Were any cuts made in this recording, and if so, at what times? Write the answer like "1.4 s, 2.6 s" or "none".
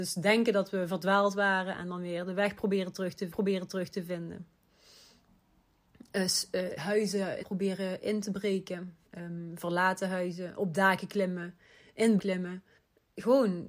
3.3 s, 6.8 s, 7.4 s, 9.1 s, 12.2 s, 12.8 s